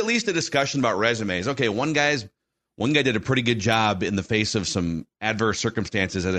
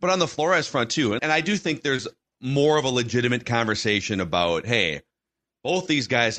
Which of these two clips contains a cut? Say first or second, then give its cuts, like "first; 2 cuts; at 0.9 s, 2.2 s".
second; 1 cut; at 1.2 s